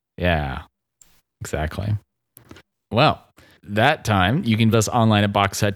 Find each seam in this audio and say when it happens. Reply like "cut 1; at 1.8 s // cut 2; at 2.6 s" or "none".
cut 1; at 3.6 s // cut 2; at 4.7 s